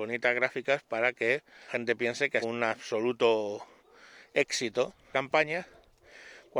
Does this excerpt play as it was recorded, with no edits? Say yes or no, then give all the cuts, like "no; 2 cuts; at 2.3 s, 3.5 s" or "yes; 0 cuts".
no; 3 cuts; at 1.7 s, 2.4 s, 5.1 s